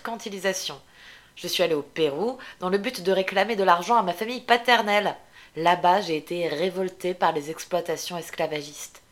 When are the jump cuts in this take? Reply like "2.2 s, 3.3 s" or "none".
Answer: none